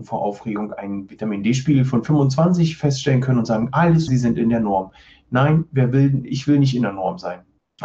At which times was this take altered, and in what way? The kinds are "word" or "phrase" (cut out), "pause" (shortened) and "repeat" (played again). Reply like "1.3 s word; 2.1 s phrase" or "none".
4.1 s word